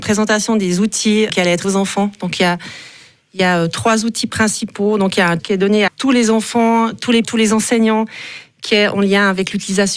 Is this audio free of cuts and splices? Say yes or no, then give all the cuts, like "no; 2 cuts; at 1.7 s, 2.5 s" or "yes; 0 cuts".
no; 5 cuts; at 1.3 s, 1.6 s, 5.4 s, 5.9 s, 7.2 s